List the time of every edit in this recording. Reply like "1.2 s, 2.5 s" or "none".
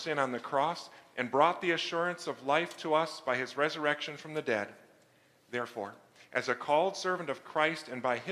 none